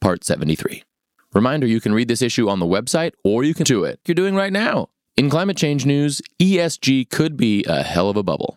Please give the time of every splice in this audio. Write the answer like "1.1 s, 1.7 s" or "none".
3.6 s, 4.1 s